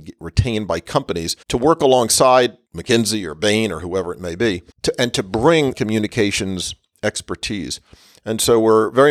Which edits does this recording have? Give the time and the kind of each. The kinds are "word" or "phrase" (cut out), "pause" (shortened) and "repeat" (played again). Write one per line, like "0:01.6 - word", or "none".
0:01.4 - pause
0:02.6 - pause
0:04.7 - pause
0:05.7 - word